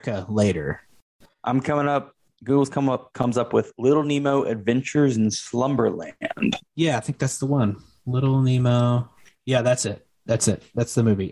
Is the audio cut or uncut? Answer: uncut